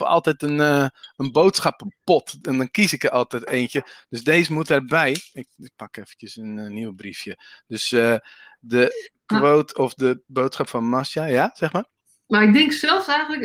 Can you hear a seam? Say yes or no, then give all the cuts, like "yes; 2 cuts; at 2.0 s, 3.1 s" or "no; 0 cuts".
no; 0 cuts